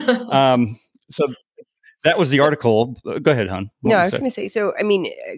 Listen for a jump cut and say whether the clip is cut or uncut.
uncut